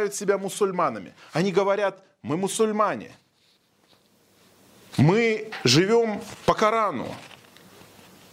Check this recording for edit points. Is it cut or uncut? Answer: uncut